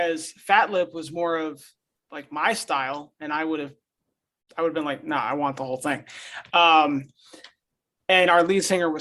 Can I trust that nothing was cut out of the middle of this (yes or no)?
yes